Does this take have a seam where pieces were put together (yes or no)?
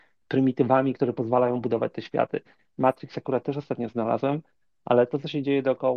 no